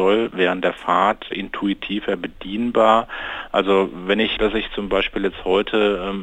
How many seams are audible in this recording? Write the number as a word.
two